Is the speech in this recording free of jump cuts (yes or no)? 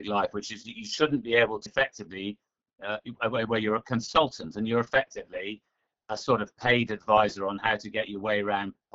no